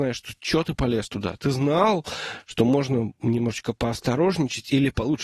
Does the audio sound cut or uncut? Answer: uncut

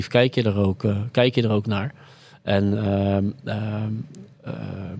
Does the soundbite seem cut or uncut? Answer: uncut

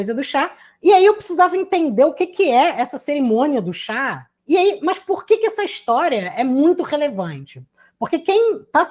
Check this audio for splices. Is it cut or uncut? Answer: cut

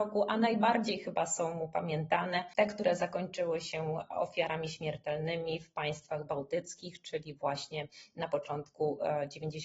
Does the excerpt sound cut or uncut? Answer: uncut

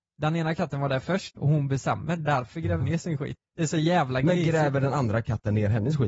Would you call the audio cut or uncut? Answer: cut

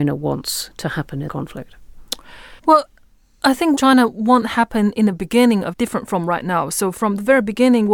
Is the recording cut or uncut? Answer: cut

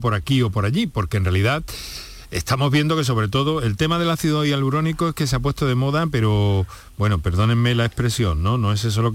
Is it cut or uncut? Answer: uncut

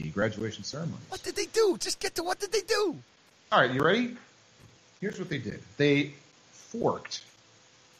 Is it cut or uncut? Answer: uncut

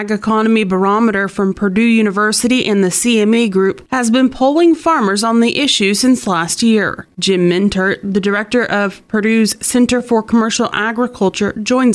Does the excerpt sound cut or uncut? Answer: uncut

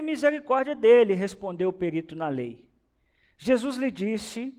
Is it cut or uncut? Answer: uncut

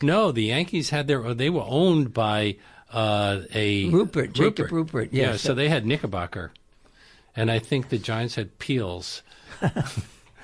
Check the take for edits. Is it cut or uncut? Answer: uncut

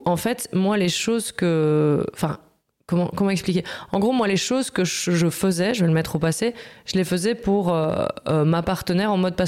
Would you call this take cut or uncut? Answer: uncut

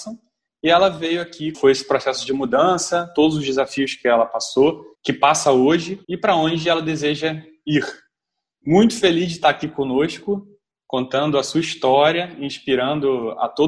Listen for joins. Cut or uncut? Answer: cut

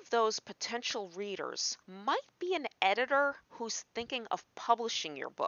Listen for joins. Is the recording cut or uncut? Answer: cut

